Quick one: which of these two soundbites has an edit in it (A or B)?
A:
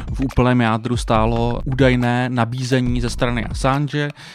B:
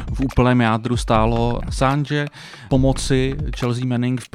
B